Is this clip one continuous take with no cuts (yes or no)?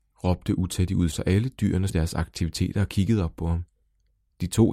no